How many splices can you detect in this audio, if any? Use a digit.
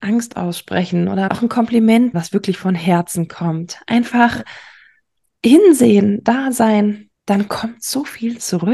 3